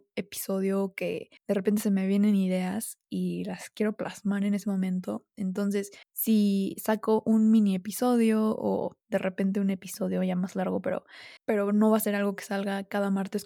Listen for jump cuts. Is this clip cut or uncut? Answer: cut